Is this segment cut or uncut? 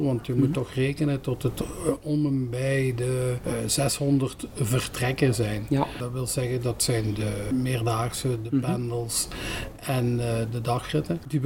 uncut